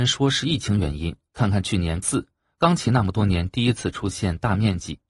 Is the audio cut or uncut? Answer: cut